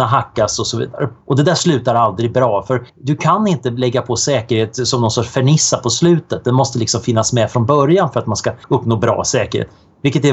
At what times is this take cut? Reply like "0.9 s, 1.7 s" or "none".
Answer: 1.2 s, 2.9 s, 8.6 s